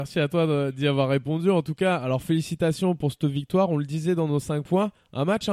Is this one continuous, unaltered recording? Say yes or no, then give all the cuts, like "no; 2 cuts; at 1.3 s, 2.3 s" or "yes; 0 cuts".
yes; 0 cuts